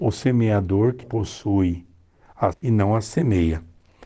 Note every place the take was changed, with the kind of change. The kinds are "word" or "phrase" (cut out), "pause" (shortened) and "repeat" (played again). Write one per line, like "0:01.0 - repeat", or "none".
0:01.0 - word
0:02.5 - word